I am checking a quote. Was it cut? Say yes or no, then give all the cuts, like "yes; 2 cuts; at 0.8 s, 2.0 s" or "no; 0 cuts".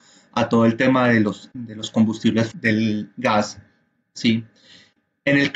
yes; 1 cut; at 2.5 s